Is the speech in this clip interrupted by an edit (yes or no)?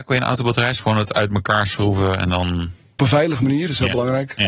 yes